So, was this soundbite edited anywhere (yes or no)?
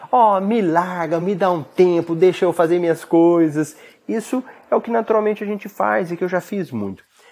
no